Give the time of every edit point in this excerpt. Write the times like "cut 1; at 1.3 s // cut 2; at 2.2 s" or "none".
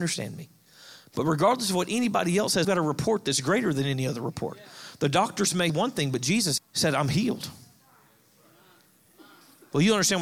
cut 1; at 2.6 s // cut 2; at 5.7 s // cut 3; at 6.6 s